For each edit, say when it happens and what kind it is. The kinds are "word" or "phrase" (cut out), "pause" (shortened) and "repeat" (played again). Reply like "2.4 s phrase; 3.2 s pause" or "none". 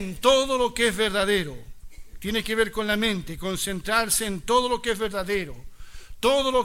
none